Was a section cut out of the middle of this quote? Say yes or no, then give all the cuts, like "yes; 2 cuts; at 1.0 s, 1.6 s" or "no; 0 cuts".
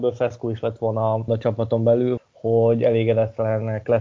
yes; 2 cuts; at 1.3 s, 2.2 s